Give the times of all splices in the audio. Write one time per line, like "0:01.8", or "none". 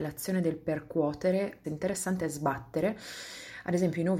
0:01.6